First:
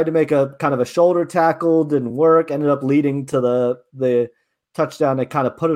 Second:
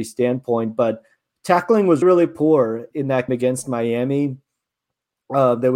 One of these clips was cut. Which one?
second; 3 cuts; at 2.0 s, 2.9 s, 3.3 s

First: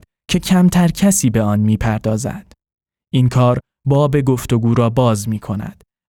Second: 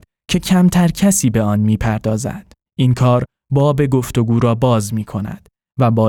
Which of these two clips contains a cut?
second; 1 cut; at 2.7 s

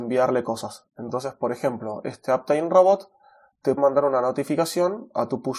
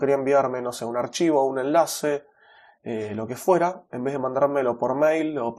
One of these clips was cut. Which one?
first; 1 cut; at 3.8 s

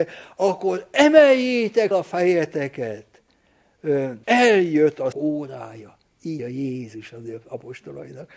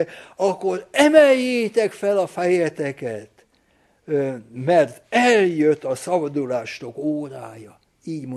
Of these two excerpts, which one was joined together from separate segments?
first; 4 cuts; at 1.9 s, 4.2 s, 5.1 s, 6.4 s

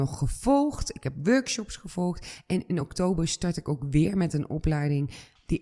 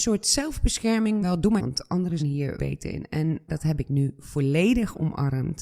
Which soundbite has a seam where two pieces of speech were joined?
second; 5 cuts; at 1.2 s, 1.6 s, 2.2 s, 2.6 s, 3.5 s

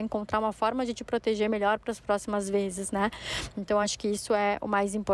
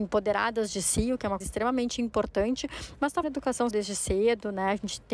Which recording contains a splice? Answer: second; 3 cuts; at 1.4 s, 3.2 s, 3.7 s

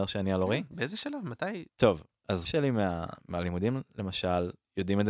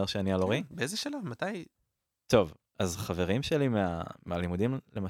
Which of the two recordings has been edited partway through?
first; 2 cuts; at 1.7 s, 2.5 s

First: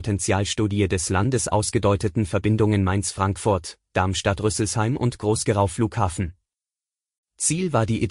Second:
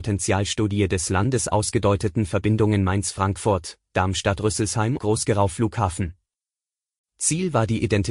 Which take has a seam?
second; 1 cut; at 5.0 s

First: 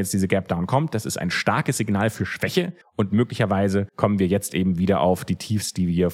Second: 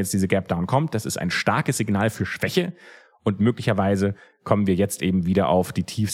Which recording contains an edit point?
first; 2 cuts; at 2.8 s, 3.9 s

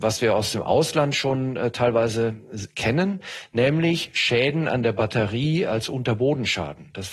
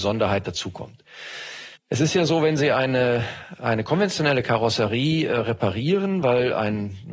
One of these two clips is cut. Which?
second; 1 cut; at 1.8 s

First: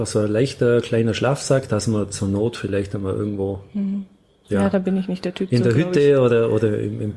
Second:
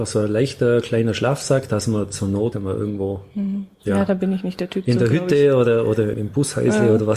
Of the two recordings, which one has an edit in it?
second; 3 cuts; at 2.5 s, 3.7 s, 6.1 s

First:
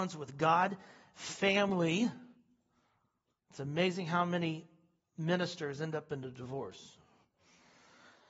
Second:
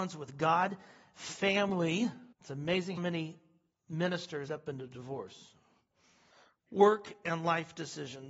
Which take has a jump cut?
second; 4 cuts; at 2.3 s, 3.0 s, 4.5 s, 6.3 s

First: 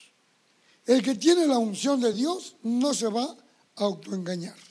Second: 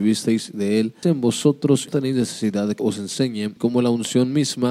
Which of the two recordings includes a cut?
second; 4 cuts; at 1.0 s, 1.9 s, 2.8 s, 3.6 s

